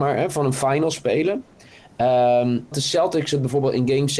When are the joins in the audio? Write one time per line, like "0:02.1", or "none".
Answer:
0:02.7

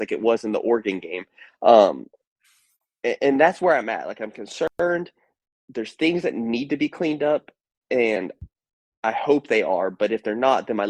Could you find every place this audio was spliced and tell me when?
none

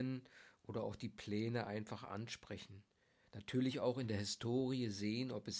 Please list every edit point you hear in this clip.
none

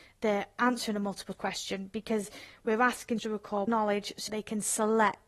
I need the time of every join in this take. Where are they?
0:01.3
0:03.2
0:03.7
0:04.3

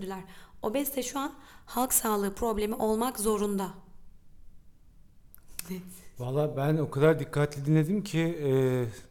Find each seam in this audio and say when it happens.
none

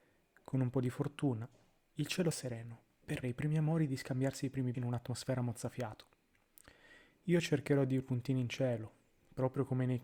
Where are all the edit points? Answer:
0:02.3
0:03.2
0:04.7
0:08.0

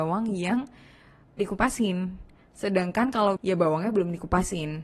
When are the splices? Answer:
0:01.4
0:03.4

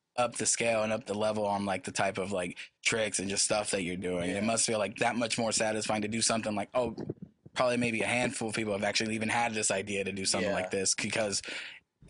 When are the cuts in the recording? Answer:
0:02.8

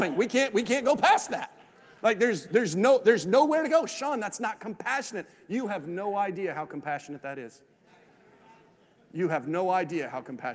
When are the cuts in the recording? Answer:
none

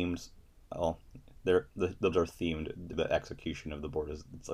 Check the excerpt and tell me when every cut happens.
0:02.1
0:02.9

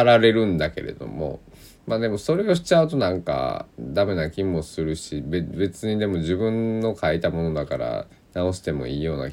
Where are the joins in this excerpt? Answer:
0:03.7
0:08.1

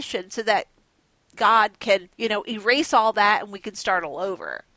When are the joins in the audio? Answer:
0:02.1

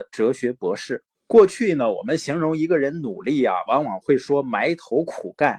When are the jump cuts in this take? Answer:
0:01.1

